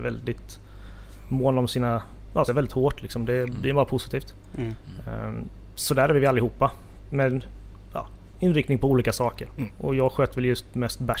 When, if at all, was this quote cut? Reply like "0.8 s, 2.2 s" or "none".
2.5 s

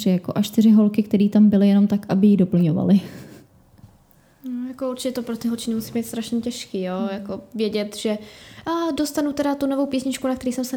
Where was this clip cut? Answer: none

